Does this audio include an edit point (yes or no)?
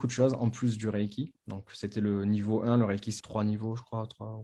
yes